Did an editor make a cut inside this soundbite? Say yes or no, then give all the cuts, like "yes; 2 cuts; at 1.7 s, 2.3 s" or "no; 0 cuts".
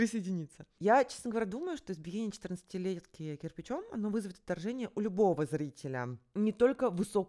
no; 0 cuts